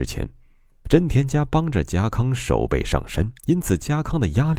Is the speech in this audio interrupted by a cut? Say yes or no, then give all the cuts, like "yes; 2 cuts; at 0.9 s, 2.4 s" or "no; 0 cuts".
yes; 1 cut; at 3.4 s